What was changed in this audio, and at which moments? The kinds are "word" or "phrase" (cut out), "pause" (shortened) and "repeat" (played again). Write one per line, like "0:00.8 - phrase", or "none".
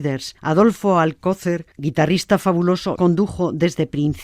0:03.0 - word